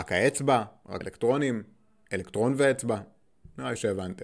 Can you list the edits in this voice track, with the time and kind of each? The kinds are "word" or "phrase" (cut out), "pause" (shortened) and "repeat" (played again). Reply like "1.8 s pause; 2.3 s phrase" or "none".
1.0 s word